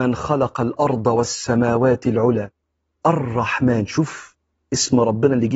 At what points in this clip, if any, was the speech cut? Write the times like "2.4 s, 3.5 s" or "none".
none